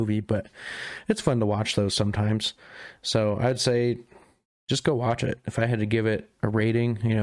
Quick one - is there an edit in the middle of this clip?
no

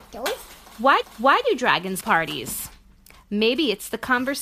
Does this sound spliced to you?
yes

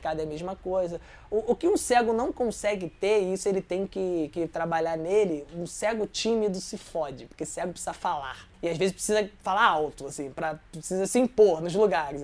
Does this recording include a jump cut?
yes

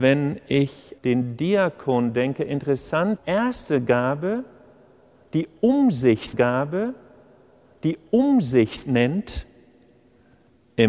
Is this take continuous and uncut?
no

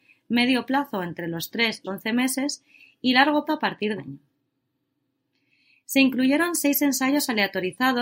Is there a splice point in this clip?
yes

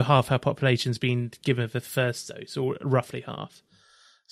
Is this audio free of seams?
yes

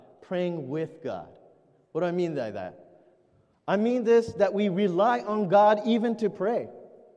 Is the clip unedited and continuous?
yes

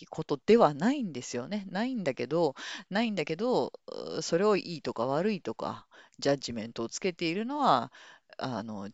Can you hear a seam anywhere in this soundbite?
no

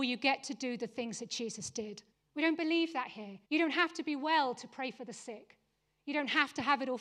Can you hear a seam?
yes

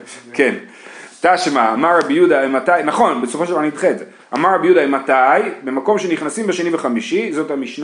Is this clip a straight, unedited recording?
yes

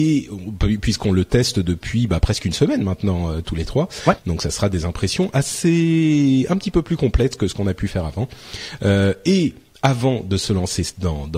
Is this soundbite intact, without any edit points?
yes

